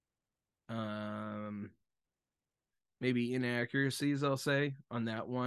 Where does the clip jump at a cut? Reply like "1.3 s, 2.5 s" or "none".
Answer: none